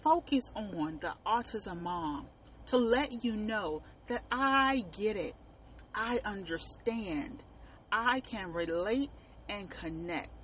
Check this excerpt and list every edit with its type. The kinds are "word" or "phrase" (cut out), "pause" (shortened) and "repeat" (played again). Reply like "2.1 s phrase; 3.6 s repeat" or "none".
none